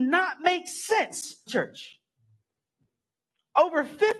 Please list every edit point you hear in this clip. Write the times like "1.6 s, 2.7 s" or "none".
1.5 s